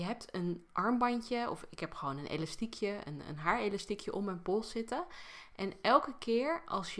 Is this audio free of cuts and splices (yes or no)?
yes